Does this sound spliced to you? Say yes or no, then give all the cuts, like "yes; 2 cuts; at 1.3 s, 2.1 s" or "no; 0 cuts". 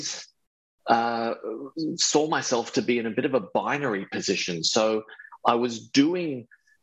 no; 0 cuts